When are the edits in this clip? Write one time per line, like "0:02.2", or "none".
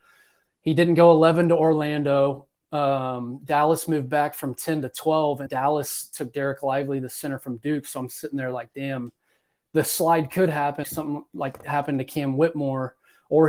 0:05.5
0:10.8